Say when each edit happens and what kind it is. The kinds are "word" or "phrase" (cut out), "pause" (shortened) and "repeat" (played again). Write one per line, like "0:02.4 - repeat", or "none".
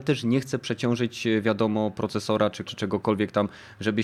0:02.7 - word

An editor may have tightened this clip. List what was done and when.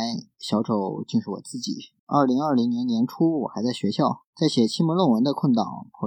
0:02.0 - pause
0:04.3 - pause

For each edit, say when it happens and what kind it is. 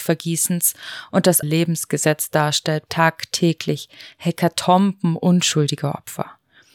0:01.4 - phrase
0:02.9 - word

